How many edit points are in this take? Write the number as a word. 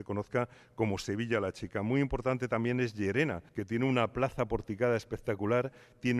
one